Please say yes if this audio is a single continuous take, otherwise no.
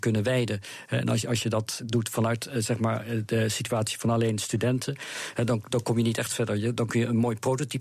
yes